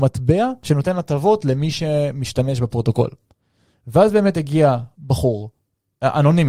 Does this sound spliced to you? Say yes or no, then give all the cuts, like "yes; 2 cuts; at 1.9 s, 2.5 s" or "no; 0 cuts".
no; 0 cuts